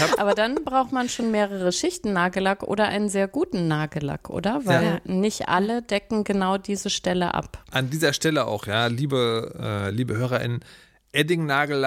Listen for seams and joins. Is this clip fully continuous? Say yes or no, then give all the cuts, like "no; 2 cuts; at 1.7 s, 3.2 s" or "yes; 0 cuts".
yes; 0 cuts